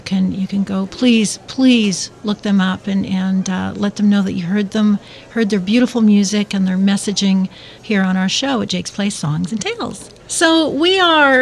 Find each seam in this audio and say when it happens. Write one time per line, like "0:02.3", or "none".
0:10.2